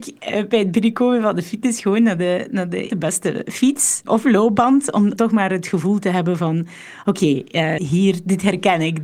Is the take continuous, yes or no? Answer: no